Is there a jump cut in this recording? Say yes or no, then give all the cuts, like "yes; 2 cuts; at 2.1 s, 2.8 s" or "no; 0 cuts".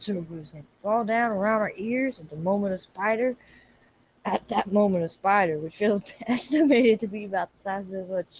no; 0 cuts